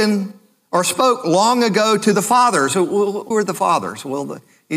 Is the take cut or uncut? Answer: cut